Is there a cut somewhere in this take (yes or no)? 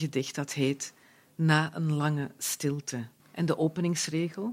yes